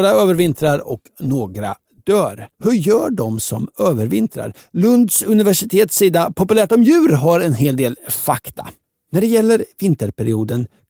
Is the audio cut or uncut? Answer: cut